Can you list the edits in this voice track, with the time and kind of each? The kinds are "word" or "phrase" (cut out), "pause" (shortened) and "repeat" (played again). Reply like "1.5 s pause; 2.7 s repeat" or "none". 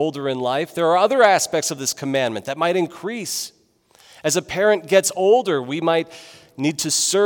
none